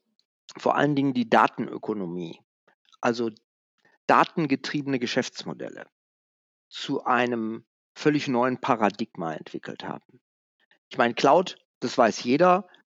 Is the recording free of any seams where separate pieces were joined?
yes; 0 cuts

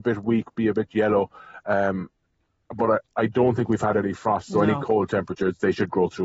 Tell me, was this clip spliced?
no; 0 cuts

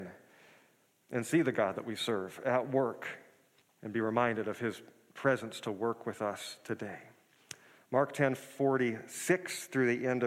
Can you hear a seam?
yes; 1 cut; at 3.6 s

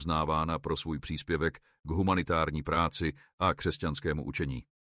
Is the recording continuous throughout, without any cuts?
yes; 0 cuts

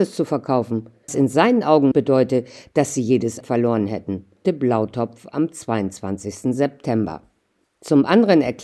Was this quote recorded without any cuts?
no; 4 cuts; at 1.1 s, 1.9 s, 3.4 s, 4.4 s

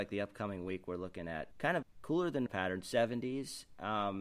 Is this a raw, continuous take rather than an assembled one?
no; 3 cuts; at 1.5 s, 1.8 s, 2.5 s

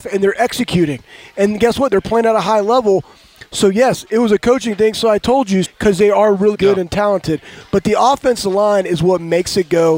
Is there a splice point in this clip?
yes; 2 cuts; at 5.6 s, 6.5 s

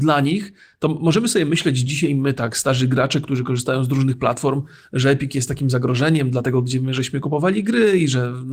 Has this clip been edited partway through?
no; 0 cuts

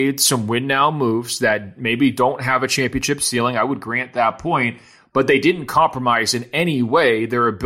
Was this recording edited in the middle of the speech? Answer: no; 0 cuts

